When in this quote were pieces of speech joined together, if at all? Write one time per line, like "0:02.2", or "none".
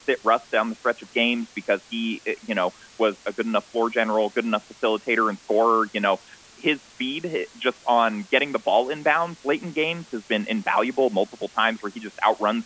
none